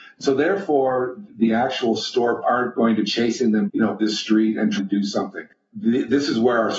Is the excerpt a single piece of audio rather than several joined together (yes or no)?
no